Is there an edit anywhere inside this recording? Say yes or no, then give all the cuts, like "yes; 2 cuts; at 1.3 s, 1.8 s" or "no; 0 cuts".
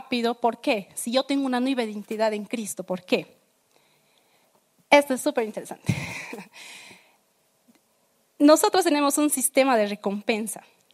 no; 0 cuts